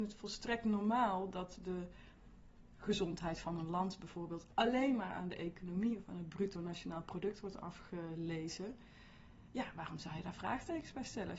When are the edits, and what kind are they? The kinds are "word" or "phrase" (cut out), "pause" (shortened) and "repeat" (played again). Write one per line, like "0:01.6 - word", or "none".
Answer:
none